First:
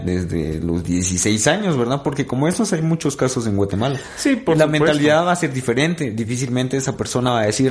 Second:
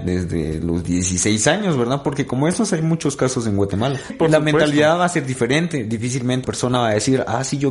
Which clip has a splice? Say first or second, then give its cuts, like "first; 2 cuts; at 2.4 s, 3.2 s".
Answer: second; 2 cuts; at 4.1 s, 6.4 s